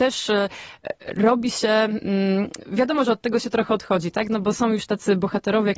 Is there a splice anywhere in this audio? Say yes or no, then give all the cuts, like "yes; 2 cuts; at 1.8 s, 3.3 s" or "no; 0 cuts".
no; 0 cuts